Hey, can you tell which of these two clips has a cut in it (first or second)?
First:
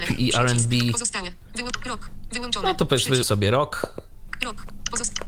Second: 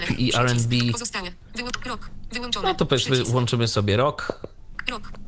first